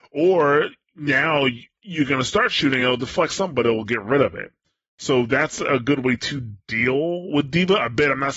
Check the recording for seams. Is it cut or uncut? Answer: uncut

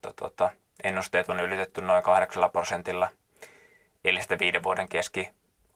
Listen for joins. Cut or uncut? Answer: uncut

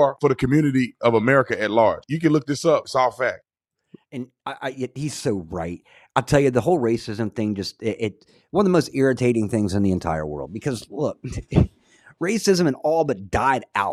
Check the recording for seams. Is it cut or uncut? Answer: uncut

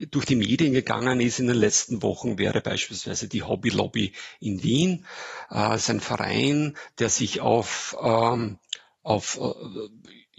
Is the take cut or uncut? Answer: uncut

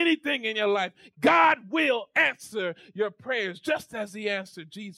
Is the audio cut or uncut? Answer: uncut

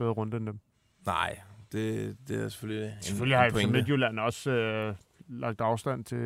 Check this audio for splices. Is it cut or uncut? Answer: uncut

